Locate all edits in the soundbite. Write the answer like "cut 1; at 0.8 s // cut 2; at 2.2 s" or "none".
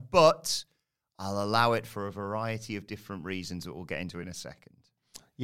none